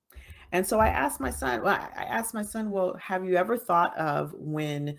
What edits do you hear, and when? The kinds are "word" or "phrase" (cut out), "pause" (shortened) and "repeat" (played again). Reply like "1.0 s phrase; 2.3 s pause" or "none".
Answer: none